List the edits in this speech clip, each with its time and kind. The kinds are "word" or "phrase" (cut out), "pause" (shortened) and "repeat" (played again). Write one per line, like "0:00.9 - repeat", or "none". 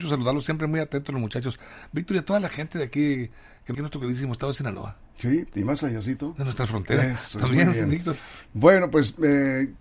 0:03.7 - phrase